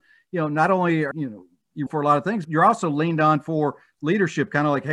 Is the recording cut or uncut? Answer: cut